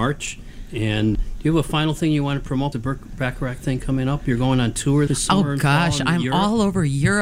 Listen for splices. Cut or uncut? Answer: cut